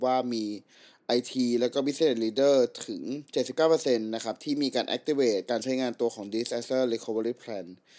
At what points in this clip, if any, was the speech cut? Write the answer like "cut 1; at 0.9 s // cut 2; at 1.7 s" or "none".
cut 1; at 3.3 s